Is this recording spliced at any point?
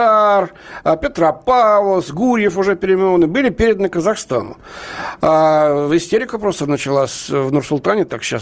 no; 0 cuts

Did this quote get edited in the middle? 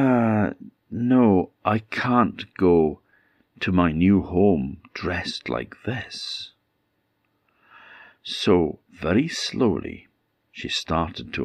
no; 0 cuts

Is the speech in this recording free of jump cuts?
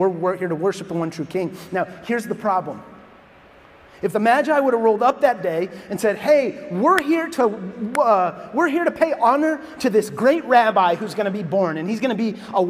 yes; 0 cuts

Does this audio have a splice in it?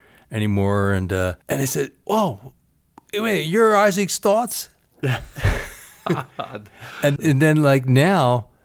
yes; 2 cuts; at 1.4 s, 7.2 s

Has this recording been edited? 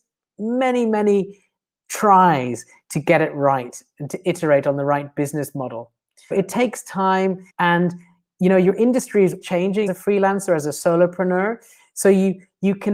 yes; 4 cuts; at 6.3 s, 7.5 s, 9.4 s, 9.9 s

